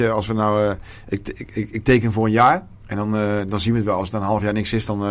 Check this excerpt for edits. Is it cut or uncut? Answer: cut